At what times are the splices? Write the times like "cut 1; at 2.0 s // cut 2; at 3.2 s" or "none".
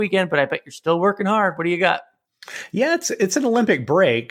none